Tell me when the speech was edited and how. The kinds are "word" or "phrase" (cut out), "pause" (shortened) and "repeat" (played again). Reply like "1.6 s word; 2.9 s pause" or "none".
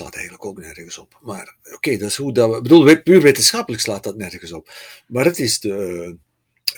none